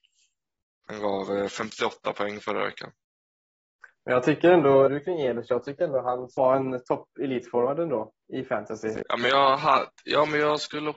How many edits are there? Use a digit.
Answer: 4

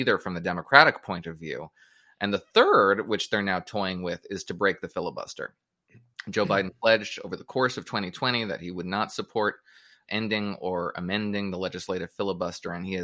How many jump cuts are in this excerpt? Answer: 1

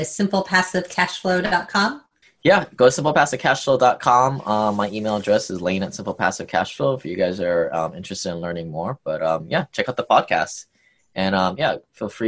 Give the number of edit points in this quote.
1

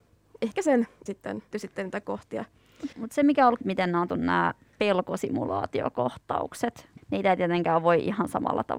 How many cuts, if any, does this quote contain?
6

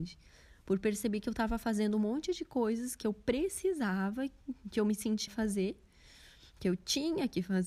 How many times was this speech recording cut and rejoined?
1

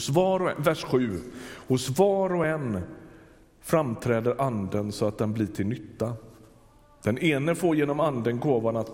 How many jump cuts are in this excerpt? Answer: 0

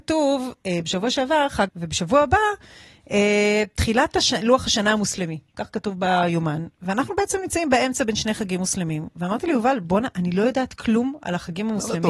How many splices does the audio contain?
1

